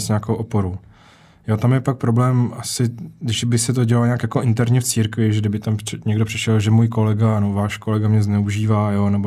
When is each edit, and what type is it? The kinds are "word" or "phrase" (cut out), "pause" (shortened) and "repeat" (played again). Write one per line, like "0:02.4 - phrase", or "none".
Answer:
none